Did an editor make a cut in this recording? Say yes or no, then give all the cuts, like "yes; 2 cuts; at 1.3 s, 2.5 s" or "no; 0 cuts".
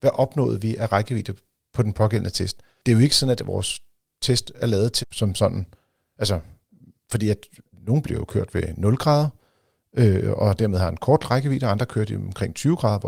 yes; 2 cuts; at 5.0 s, 8.0 s